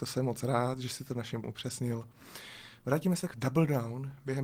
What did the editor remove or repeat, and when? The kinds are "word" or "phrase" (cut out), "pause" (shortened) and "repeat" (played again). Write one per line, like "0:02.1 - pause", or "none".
0:01.4 - word
0:03.3 - word